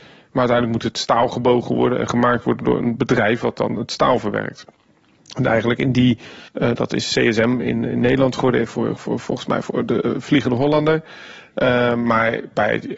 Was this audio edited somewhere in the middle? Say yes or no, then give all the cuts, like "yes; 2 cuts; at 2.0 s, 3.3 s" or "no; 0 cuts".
yes; 2 cuts; at 6.5 s, 9.0 s